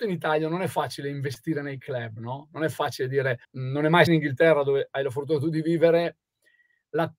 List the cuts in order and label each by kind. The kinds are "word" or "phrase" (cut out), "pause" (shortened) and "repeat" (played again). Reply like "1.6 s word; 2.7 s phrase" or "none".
3.4 s pause; 4.1 s phrase